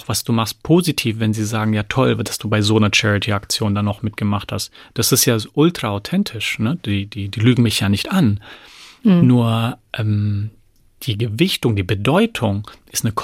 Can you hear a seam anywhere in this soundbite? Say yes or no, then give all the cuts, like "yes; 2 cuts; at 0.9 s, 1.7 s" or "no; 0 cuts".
no; 0 cuts